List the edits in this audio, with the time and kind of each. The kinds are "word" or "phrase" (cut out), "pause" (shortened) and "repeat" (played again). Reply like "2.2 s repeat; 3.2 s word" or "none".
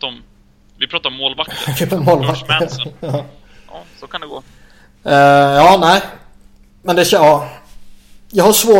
1.9 s word